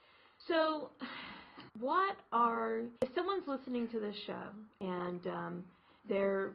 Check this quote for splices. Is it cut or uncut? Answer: cut